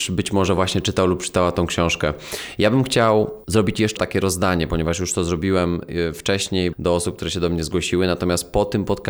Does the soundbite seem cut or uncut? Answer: cut